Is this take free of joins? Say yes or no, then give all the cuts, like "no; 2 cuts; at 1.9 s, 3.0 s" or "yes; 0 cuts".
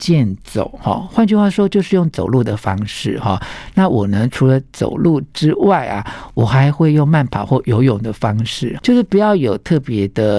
no; 1 cut; at 8.8 s